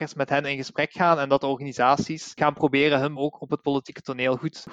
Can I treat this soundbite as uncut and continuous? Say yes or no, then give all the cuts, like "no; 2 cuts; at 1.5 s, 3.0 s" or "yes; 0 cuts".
no; 1 cut; at 3.2 s